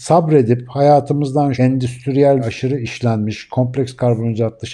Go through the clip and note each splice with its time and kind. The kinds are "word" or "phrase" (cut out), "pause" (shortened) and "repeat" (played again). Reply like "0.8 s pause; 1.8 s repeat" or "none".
1.5 s word; 2.4 s word